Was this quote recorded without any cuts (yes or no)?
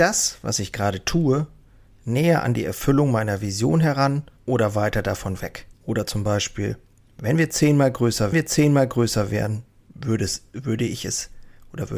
no